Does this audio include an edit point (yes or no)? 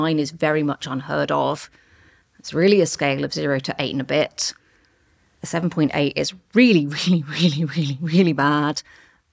no